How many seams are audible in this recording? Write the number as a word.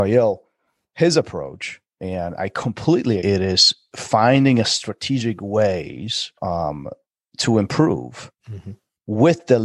two